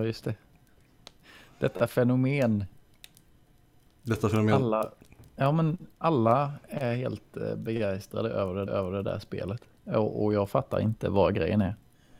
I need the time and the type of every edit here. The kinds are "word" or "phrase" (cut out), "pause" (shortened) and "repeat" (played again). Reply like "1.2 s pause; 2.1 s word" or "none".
8.7 s repeat